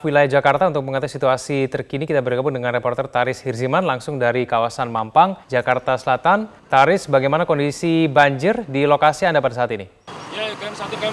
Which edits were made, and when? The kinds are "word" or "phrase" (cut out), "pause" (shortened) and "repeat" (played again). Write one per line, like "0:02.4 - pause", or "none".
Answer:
0:05.4 - pause
0:06.6 - pause